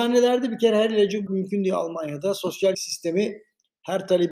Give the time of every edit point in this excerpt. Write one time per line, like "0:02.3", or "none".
0:01.3
0:02.7